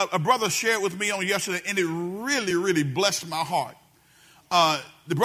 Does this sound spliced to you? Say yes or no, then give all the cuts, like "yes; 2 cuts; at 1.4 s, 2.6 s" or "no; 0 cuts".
no; 0 cuts